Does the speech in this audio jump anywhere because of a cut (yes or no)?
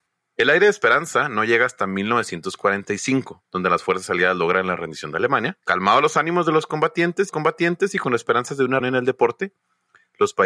yes